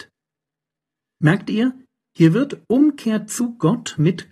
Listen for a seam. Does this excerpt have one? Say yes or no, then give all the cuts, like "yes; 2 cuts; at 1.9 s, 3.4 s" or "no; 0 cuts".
no; 0 cuts